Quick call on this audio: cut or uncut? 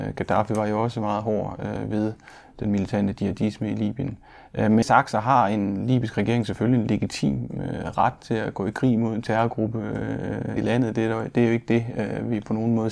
cut